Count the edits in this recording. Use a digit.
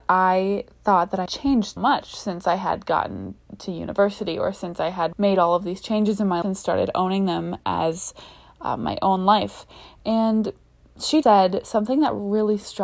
5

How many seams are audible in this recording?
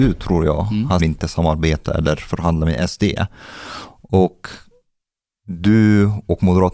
1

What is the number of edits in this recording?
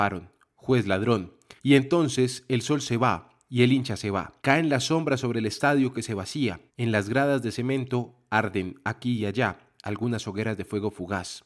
3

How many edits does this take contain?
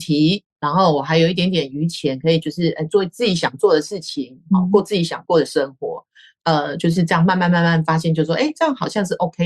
0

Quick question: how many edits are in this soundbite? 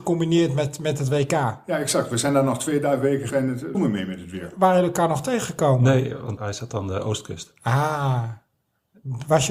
3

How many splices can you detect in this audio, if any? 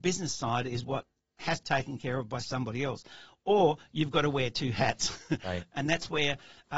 1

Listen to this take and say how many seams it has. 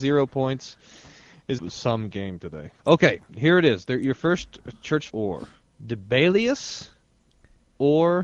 4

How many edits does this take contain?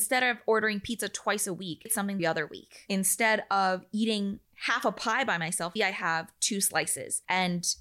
3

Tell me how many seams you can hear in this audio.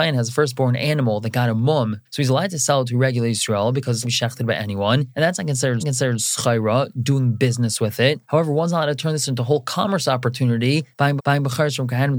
3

